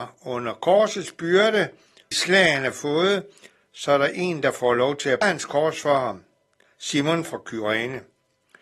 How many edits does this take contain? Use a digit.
2